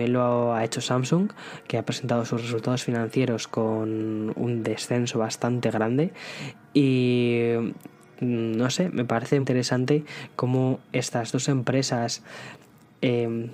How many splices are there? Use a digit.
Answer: 1